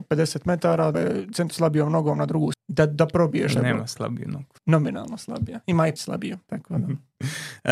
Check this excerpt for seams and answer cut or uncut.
cut